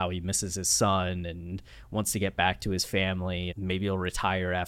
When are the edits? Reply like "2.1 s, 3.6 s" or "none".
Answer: 3.5 s